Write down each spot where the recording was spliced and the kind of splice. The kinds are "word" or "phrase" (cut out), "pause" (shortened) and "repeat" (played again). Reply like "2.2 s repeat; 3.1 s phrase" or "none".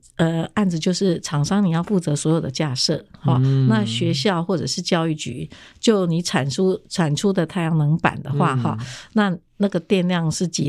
none